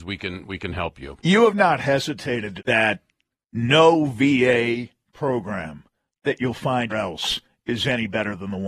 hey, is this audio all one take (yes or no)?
no